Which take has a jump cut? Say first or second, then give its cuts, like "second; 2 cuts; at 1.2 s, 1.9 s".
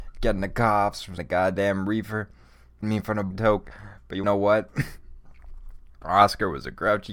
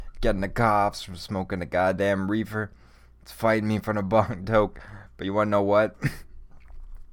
first; 4 cuts; at 1.2 s, 2.8 s, 3.3 s, 4.2 s